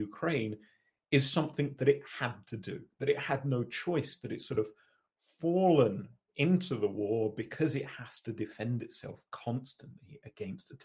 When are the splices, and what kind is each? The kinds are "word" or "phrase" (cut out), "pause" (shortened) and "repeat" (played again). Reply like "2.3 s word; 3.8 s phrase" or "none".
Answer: none